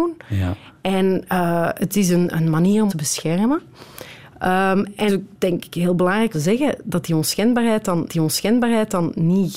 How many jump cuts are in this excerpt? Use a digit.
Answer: 5